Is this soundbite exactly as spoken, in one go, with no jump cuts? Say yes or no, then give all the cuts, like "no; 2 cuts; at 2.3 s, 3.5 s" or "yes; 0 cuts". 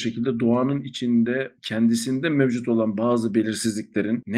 no; 1 cut; at 1.6 s